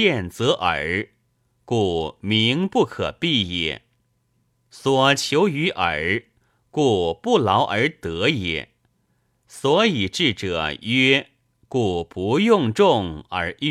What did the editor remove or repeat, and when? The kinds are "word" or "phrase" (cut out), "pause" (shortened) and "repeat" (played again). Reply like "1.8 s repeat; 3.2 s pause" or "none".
none